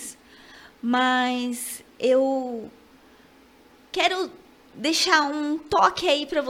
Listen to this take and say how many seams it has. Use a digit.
0